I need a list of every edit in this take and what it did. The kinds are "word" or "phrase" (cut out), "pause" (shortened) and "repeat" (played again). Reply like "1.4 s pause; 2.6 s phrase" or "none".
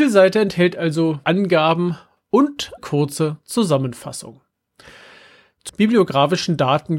1.2 s word; 2.8 s word; 5.7 s word